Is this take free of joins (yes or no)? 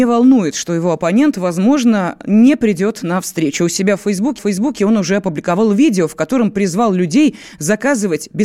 no